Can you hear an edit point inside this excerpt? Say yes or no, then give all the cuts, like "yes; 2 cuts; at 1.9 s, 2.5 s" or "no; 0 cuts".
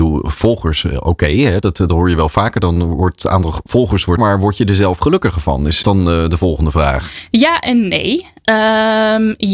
yes; 2 cuts; at 4.2 s, 5.8 s